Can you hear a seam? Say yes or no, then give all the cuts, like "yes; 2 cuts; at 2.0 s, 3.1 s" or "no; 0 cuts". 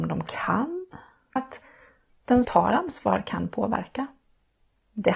yes; 2 cuts; at 1.4 s, 2.4 s